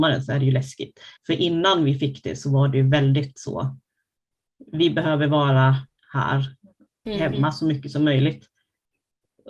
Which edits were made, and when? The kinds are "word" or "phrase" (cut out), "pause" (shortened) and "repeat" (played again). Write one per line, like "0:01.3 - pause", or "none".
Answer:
0:01.2 - pause